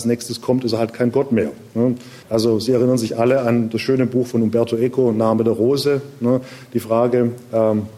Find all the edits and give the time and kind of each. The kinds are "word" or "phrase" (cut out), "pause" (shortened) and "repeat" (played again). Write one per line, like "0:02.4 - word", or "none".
0:02.2 - pause